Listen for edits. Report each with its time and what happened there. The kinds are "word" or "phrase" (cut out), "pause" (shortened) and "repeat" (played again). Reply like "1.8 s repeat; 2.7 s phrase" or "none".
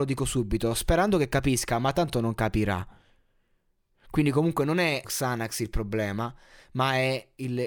5.0 s word

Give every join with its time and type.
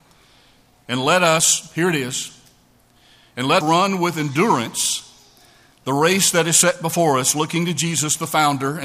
3.6 s word

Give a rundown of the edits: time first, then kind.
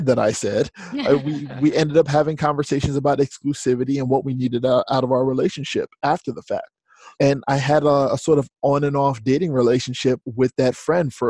7.1 s pause

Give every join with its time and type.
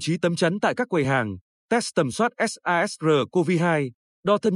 none

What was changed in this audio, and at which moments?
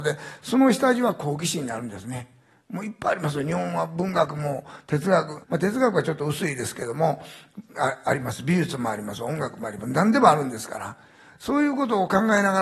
5.4 s pause

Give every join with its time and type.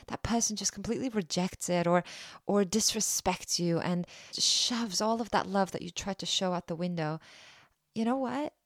4.3 s word

